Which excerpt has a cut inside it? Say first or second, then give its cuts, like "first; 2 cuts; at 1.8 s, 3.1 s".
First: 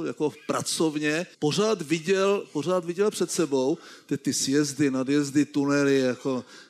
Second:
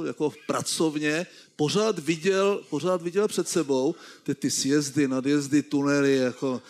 first; 1 cut; at 1.3 s